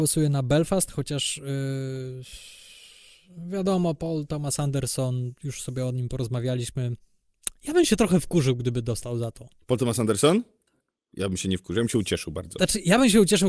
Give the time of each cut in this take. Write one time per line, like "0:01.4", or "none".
none